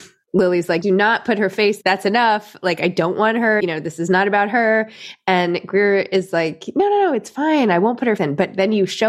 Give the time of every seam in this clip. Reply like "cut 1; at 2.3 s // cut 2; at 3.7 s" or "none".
cut 1; at 1.8 s // cut 2; at 3.6 s // cut 3; at 8.2 s